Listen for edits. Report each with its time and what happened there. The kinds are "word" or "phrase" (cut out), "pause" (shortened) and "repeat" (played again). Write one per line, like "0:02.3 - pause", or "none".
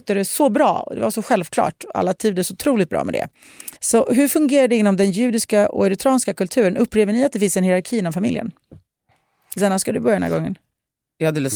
0:03.8 - pause

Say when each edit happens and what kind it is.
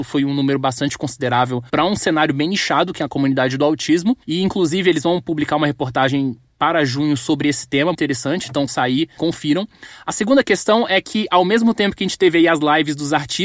0:01.7 - pause
0:04.2 - pause
0:07.9 - word
0:08.7 - word
0:09.2 - word

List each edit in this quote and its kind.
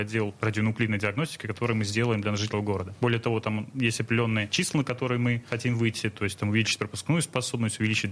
0:02.5 - word

